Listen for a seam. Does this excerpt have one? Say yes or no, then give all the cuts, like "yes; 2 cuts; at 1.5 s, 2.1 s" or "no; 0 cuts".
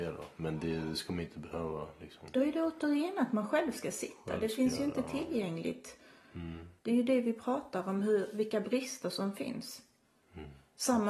yes; 1 cut; at 6.8 s